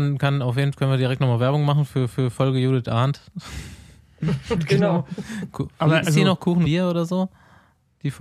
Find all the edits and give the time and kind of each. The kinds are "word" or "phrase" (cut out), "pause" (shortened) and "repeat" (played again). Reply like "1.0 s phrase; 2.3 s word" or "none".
2.1 s repeat; 6.0 s phrase; 6.6 s word

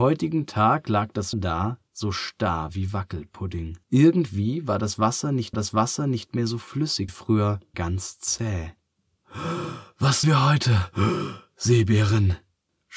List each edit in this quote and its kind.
1.3 s word; 1.9 s pause; 3.8 s pause; 5.5 s repeat; 7.1 s word; 7.7 s word; 10.2 s word

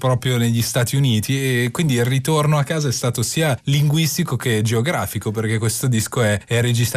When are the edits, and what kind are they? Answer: none

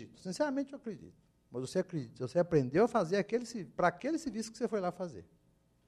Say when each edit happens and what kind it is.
none

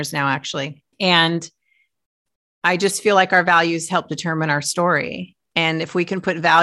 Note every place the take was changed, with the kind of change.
0.9 s pause; 5.4 s pause

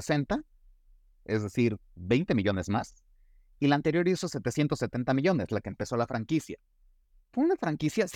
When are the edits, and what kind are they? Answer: none

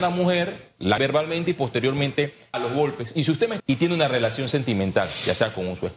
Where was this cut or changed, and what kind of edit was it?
1.0 s word; 2.5 s word; 3.6 s word

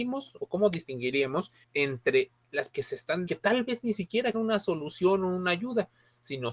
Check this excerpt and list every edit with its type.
1.6 s word; 2.7 s word; 3.3 s phrase; 4.3 s word

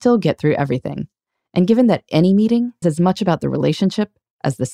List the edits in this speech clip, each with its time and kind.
2.8 s word

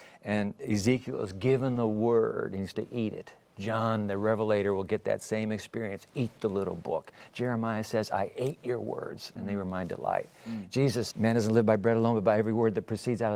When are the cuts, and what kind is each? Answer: 2.7 s word; 11.1 s word

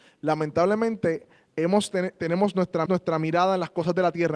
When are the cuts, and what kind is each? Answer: 2.9 s repeat

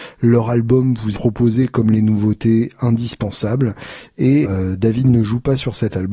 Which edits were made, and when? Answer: 1.1 s word; 4.4 s word

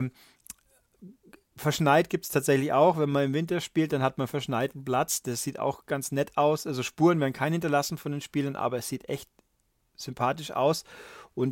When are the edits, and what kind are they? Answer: none

